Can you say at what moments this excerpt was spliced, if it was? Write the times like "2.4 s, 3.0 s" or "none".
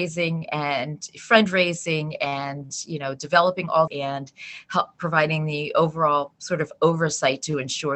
3.9 s